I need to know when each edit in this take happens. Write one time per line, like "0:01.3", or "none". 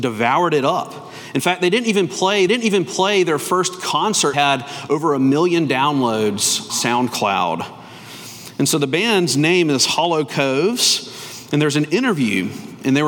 0:02.5
0:04.3
0:06.7

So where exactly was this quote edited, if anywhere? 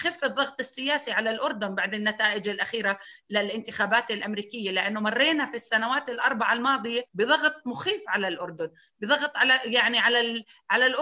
0:07.1

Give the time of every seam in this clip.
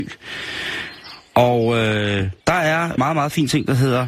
0:02.4
0:03.0

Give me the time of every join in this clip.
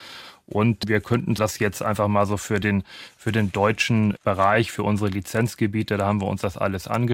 0:01.4
0:04.2

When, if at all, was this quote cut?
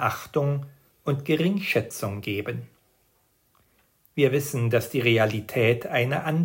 none

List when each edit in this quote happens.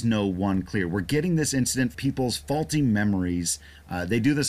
0:01.9

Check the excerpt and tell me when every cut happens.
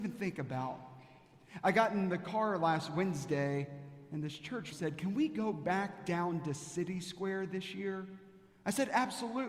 0:04.7

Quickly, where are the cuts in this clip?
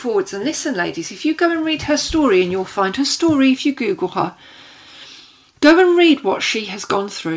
none

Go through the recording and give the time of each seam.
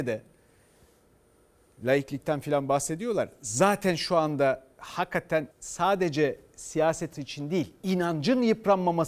0:05.5
0:07.1

